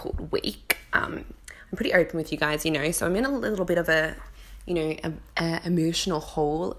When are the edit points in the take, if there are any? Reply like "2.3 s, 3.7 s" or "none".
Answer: none